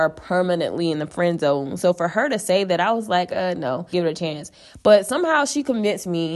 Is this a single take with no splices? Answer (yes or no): no